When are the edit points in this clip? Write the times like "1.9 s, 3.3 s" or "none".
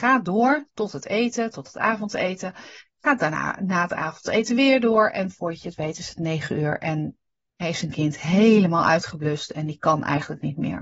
none